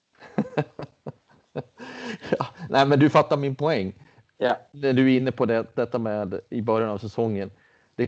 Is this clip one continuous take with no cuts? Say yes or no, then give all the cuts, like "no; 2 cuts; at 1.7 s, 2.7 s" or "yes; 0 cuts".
yes; 0 cuts